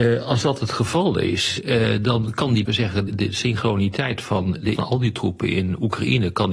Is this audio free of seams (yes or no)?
no